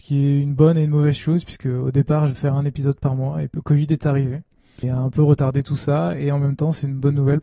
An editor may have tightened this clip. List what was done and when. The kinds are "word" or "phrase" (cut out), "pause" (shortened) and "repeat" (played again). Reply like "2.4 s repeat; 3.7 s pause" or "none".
2.3 s word; 3.5 s word; 4.8 s word